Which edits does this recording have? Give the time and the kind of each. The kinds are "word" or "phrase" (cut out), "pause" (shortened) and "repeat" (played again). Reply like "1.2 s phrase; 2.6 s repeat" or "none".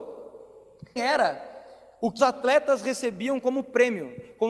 1.0 s word; 2.2 s word